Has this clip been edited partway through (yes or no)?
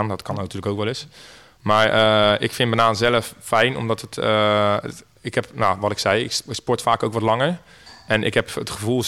no